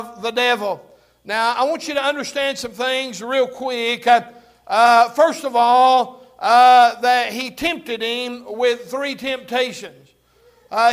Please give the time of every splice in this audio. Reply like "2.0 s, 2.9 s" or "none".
none